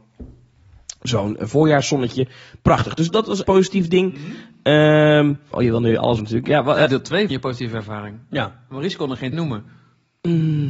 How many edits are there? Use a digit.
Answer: 7